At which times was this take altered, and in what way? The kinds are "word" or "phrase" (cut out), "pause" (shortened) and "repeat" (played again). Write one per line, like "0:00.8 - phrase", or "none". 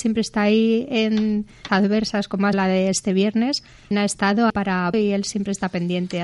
0:01.7 - word
0:02.5 - word
0:03.9 - word
0:04.5 - word
0:04.9 - word